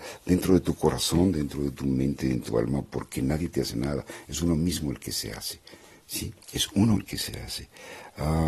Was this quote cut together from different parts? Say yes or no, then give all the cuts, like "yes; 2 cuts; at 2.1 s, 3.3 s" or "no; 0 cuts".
yes; 3 cuts; at 2.5 s, 6.4 s, 7.0 s